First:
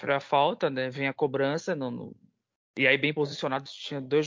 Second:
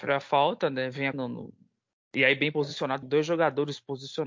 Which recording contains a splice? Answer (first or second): second